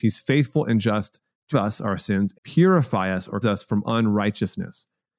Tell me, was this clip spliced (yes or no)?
yes